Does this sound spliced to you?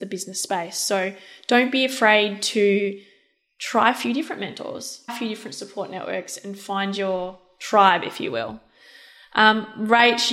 yes; 1 cut; at 5.1 s

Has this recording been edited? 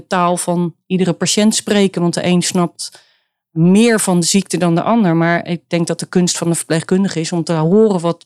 no; 0 cuts

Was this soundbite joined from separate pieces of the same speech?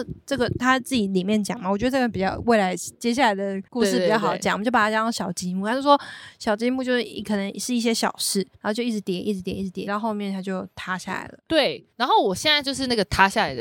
yes; 5 cuts; at 3.7 s, 8.5 s, 9.9 s, 10.7 s, 11.9 s

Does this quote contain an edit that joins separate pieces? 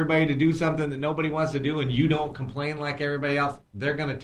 no; 0 cuts

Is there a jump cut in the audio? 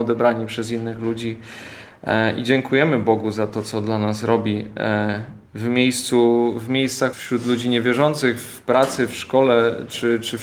yes; 2 cuts; at 5.5 s, 7.1 s

